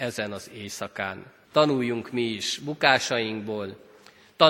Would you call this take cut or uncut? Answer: cut